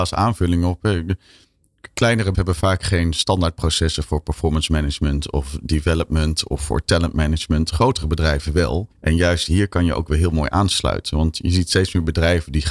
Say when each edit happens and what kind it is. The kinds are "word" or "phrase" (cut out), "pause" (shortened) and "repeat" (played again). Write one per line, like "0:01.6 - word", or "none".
0:02.3 - word
0:08.9 - pause